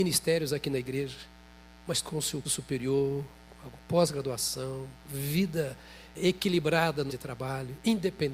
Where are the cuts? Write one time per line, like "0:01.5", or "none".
0:02.0
0:02.4
0:06.1
0:07.1